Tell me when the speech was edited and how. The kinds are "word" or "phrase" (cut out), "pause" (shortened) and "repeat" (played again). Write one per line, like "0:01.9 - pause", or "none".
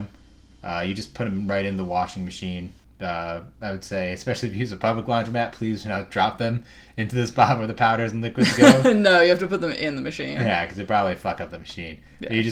none

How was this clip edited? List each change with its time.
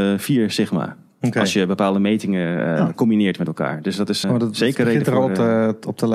0:04.2 - word

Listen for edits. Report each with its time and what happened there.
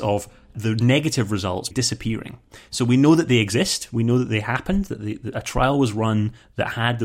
0:01.7 - word

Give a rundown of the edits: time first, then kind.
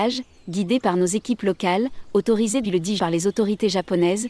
0:02.6 - word
0:03.0 - word

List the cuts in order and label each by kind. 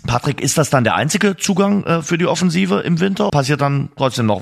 0:03.3 - word

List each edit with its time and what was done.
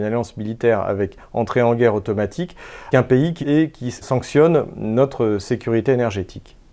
0:02.9 - word
0:03.4 - phrase
0:04.0 - word

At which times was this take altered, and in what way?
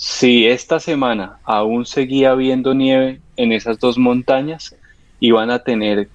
none

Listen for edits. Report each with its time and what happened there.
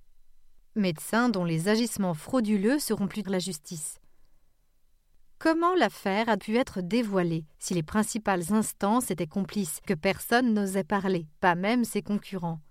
0:03.2 - phrase
0:06.4 - word
0:07.5 - pause
0:09.9 - word

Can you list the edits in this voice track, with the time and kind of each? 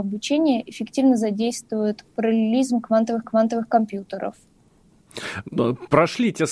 0:03.2 - repeat

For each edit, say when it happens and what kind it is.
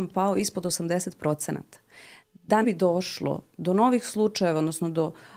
0:02.6 - word

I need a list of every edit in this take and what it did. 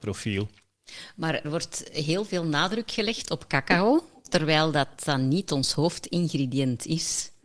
0:01.4 - word

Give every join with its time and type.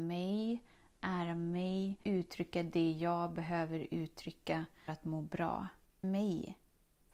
0:02.0 - word
0:04.9 - word
0:06.0 - word

